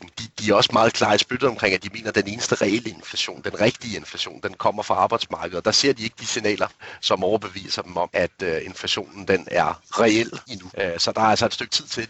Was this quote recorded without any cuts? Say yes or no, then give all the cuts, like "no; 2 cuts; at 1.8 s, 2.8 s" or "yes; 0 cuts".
yes; 0 cuts